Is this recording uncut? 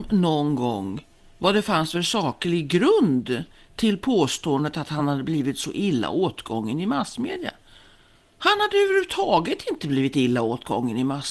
yes; 0 cuts

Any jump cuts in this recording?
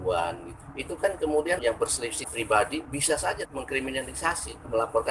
yes; 3 cuts; at 1.6 s, 2.2 s, 3.4 s

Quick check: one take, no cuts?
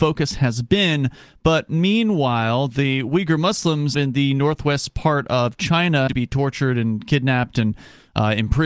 no; 2 cuts; at 3.9 s, 6.1 s

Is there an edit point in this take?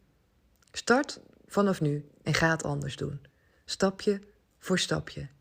no; 0 cuts

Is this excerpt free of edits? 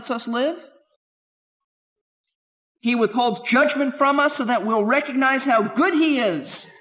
yes; 0 cuts

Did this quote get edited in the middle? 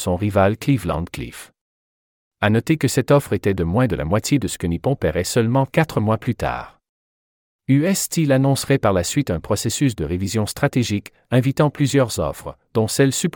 no; 0 cuts

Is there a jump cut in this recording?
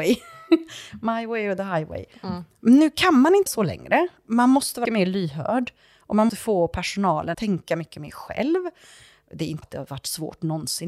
yes; 5 cuts; at 3.5 s, 4.9 s, 6.3 s, 7.3 s, 9.6 s

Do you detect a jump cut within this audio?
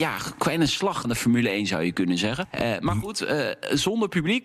yes; 1 cut; at 1.0 s

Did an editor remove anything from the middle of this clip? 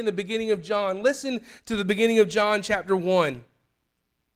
no; 0 cuts

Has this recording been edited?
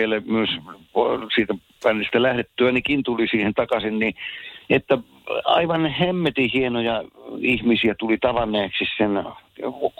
yes; 1 cut; at 4.6 s

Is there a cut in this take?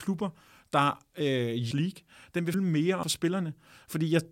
yes; 3 cuts; at 1.7 s, 2.5 s, 3.0 s

